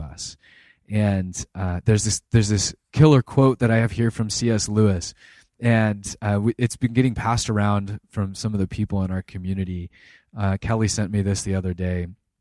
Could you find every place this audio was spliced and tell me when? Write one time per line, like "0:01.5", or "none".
none